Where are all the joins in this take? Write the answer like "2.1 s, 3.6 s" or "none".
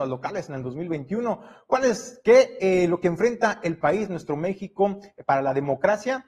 none